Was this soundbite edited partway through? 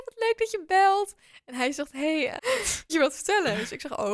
yes; 2 cuts; at 2.4 s, 2.9 s

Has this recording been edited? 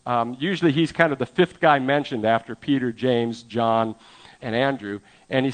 yes; 1 cut; at 4.4 s

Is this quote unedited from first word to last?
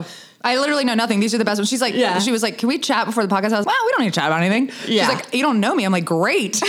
no; 1 cut; at 3.6 s

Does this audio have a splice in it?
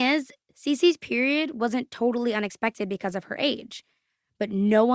no; 0 cuts

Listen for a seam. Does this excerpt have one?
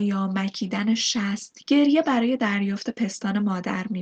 yes; 1 cut; at 1.6 s

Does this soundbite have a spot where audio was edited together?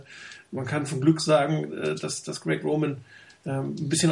no; 0 cuts

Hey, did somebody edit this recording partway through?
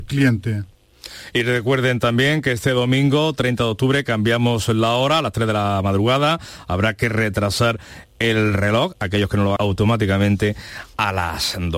yes; 1 cut; at 9.6 s

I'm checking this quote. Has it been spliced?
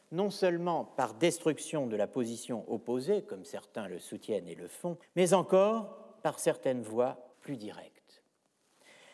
yes; 2 cuts; at 5.0 s, 7.3 s

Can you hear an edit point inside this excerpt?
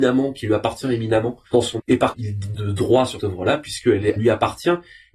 yes; 6 cuts; at 1.5 s, 1.8 s, 2.1 s, 2.5 s, 3.2 s, 4.2 s

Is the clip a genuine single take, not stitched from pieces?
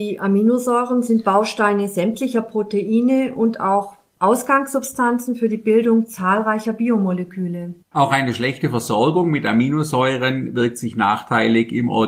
no; 1 cut; at 7.8 s

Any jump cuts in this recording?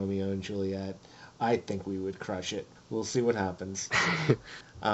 no; 0 cuts

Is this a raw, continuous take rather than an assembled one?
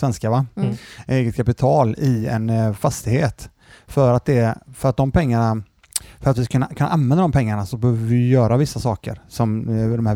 yes; 0 cuts

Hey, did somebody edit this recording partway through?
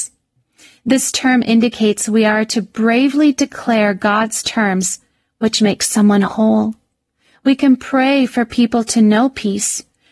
no; 0 cuts

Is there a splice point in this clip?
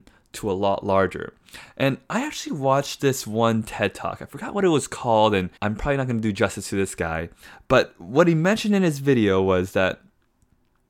yes; 1 cut; at 5.6 s

